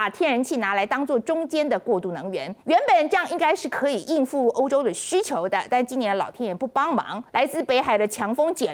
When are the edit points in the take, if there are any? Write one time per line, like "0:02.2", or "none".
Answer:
0:02.6
0:07.3